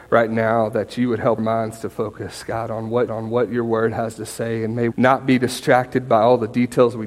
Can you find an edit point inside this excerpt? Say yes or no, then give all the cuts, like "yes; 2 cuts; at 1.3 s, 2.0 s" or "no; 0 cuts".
yes; 3 cuts; at 1.4 s, 3.1 s, 4.9 s